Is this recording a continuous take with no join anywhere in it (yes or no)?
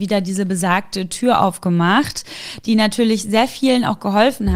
yes